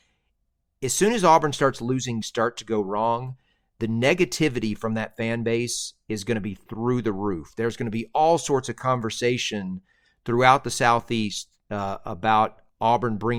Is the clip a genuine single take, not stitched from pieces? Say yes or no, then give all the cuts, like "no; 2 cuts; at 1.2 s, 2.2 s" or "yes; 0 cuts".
no; 1 cut; at 2.2 s